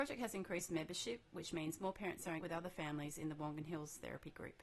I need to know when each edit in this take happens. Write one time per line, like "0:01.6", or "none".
0:02.4